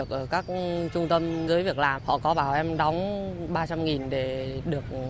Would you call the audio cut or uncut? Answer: cut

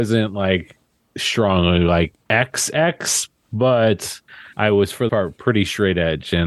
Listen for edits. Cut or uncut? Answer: cut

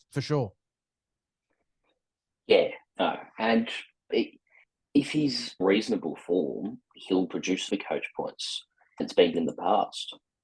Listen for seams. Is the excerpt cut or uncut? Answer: cut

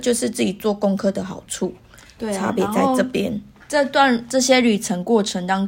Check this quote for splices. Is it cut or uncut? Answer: uncut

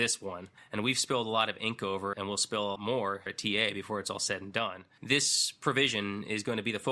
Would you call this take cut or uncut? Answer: cut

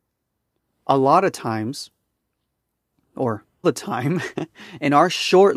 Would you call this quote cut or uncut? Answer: cut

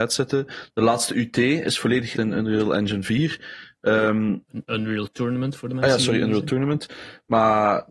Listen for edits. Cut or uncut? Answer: cut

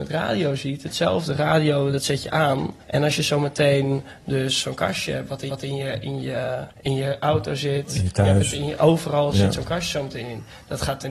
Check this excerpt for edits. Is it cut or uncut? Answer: cut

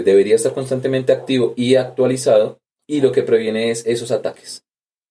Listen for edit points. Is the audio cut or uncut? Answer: uncut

